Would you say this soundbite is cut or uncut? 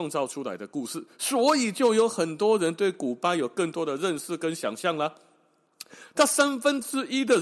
uncut